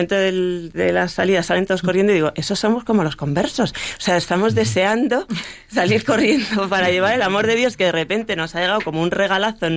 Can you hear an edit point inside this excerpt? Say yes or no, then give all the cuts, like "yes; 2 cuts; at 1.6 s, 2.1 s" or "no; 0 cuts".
no; 0 cuts